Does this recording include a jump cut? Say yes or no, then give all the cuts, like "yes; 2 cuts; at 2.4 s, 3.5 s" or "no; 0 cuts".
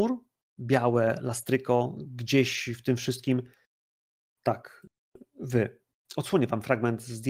no; 0 cuts